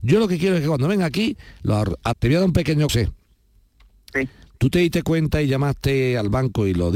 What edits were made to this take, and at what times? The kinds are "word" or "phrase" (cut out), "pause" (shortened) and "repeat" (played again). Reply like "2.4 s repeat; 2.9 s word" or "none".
2.1 s word; 2.9 s word